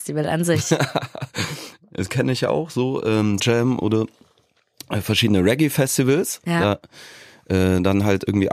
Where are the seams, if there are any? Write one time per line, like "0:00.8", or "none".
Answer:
0:03.4